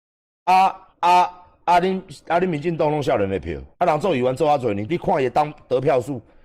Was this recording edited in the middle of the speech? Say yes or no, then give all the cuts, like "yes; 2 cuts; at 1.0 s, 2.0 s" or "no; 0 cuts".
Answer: yes; 3 cuts; at 0.9 s, 3.7 s, 4.9 s